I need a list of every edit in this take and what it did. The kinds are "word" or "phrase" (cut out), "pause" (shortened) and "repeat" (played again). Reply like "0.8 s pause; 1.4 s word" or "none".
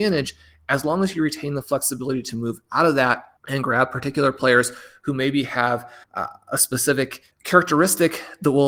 3.4 s pause; 6.0 s pause; 7.3 s pause